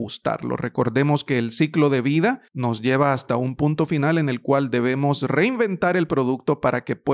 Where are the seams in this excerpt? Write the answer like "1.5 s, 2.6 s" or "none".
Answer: 2.5 s